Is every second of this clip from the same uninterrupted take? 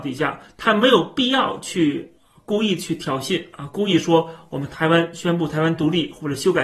yes; 0 cuts

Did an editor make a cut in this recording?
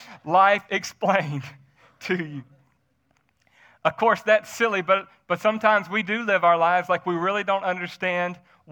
no; 0 cuts

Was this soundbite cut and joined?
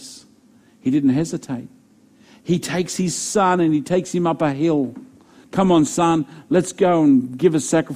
no; 0 cuts

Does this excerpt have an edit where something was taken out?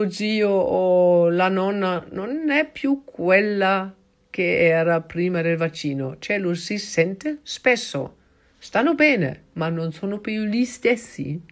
no; 0 cuts

